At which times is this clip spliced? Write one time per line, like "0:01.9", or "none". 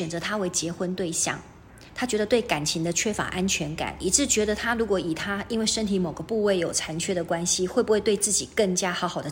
0:01.9